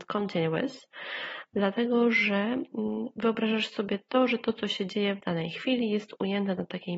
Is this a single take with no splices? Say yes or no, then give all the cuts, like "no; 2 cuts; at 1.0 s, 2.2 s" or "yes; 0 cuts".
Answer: yes; 0 cuts